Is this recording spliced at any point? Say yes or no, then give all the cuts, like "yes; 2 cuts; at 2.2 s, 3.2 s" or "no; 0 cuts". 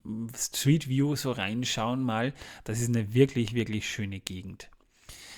no; 0 cuts